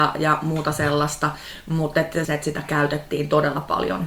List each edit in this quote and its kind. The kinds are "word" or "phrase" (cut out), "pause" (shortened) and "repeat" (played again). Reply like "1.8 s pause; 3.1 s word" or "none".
2.2 s phrase